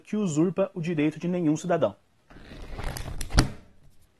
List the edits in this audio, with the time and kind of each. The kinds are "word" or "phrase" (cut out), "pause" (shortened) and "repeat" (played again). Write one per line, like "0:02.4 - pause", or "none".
none